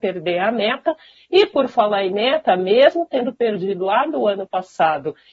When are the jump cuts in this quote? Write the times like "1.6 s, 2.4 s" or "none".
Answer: none